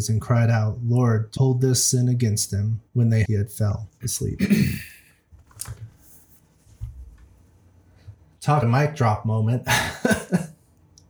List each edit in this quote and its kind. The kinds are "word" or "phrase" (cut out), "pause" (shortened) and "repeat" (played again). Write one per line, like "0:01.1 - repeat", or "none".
0:01.4 - word
0:02.9 - pause
0:03.3 - phrase
0:08.6 - word